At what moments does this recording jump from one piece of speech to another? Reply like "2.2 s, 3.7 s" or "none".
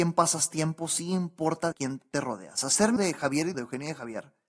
1.7 s, 3.0 s, 3.5 s